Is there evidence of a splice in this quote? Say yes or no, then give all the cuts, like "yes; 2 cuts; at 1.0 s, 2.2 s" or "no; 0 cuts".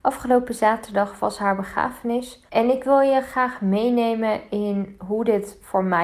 yes; 1 cut; at 2.5 s